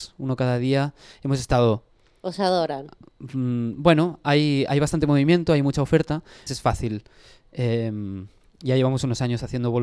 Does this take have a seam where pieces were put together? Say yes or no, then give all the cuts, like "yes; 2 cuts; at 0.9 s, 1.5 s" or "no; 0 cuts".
yes; 1 cut; at 6.5 s